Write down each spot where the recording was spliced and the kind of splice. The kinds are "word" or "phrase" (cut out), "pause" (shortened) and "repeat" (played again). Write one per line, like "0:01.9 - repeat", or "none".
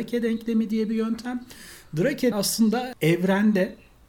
0:02.3 - word
0:02.9 - word